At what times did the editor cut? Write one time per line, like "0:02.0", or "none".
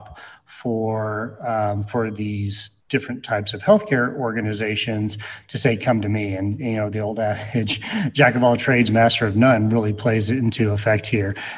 0:02.8